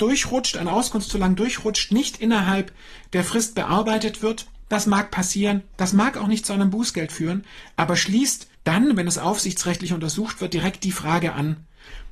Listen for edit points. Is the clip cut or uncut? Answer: cut